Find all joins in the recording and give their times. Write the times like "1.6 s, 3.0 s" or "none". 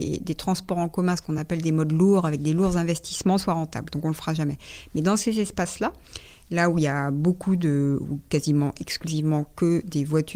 none